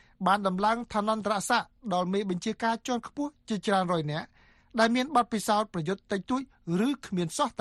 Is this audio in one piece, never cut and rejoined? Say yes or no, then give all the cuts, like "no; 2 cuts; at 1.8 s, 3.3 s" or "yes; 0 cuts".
yes; 0 cuts